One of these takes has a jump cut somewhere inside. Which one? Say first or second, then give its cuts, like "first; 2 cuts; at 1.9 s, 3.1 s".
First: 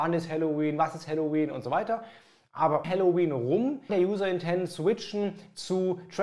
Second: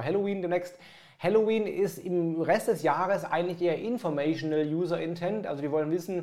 first; 2 cuts; at 2.8 s, 3.9 s